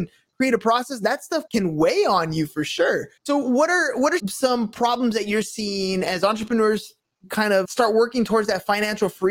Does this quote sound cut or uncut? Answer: cut